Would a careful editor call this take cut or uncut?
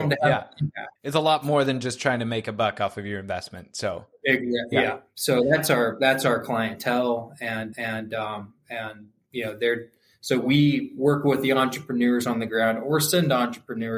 cut